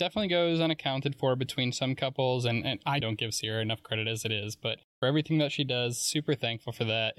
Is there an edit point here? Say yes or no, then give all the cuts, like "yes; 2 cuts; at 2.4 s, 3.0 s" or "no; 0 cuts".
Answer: yes; 1 cut; at 3.0 s